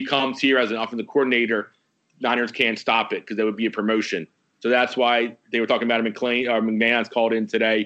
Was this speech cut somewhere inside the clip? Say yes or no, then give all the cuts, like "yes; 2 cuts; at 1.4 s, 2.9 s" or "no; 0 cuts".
no; 0 cuts